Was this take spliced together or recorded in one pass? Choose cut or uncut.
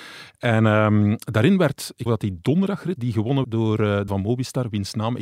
cut